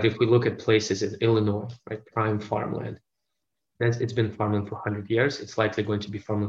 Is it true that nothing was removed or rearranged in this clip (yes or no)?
yes